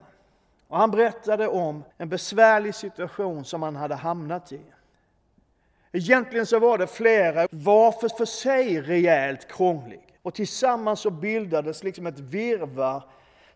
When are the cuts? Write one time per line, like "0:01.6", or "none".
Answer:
0:01.9
0:07.5
0:08.1
0:10.2